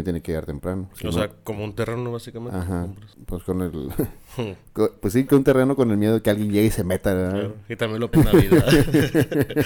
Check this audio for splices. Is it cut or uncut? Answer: cut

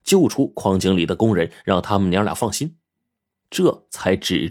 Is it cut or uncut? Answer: uncut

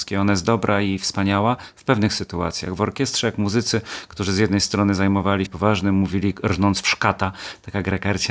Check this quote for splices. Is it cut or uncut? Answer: cut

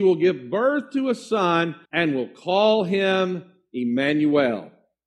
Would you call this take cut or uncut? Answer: cut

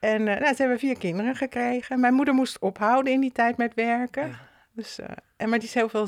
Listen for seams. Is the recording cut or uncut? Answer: uncut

